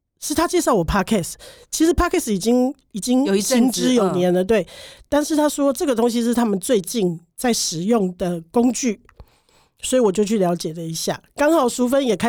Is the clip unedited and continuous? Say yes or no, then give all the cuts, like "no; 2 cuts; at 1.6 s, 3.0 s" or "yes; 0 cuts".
yes; 0 cuts